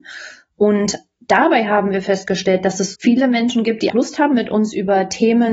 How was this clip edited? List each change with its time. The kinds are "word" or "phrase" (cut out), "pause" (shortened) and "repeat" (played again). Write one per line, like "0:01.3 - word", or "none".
0:02.9 - word
0:03.9 - word